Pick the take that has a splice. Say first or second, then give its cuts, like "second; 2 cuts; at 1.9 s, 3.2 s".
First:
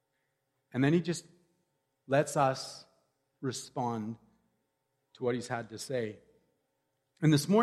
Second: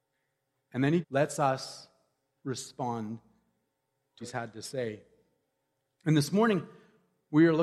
second; 2 cuts; at 1.0 s, 4.2 s